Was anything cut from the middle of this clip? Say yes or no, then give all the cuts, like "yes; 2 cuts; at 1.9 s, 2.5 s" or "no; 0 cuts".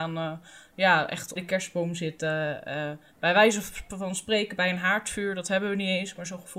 yes; 1 cut; at 1.4 s